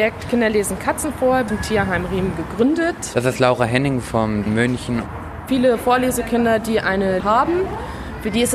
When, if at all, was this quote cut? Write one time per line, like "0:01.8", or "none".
0:01.5
0:04.5
0:07.2